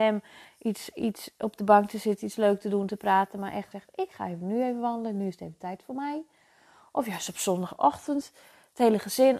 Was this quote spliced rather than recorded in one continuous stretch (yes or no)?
yes